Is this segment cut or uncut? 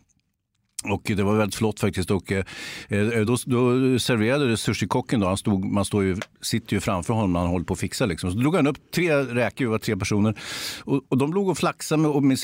uncut